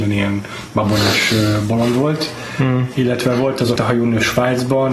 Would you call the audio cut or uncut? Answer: cut